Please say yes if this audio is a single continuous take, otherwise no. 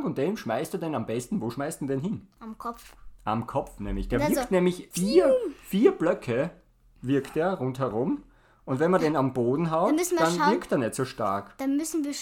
no